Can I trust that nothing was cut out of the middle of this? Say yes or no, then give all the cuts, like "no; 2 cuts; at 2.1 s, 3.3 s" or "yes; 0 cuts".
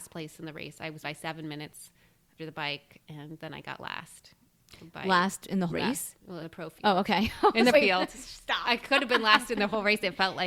no; 5 cuts; at 1.0 s, 2.4 s, 5.7 s, 6.4 s, 7.7 s